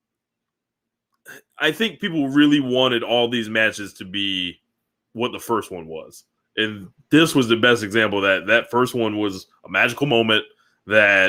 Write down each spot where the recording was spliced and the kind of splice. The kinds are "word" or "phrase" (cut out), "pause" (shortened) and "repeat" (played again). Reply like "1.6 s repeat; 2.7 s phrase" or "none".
none